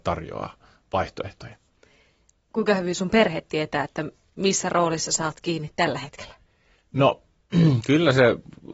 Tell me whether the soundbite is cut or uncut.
uncut